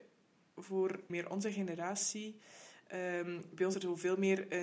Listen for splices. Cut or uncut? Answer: cut